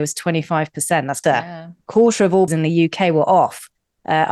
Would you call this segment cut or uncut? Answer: cut